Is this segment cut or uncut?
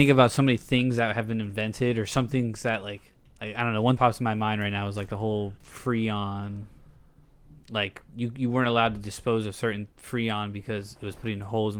cut